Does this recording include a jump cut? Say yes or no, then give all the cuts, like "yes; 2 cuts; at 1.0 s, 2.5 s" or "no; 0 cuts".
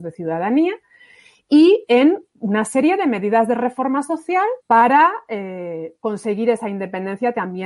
yes; 1 cut; at 4.6 s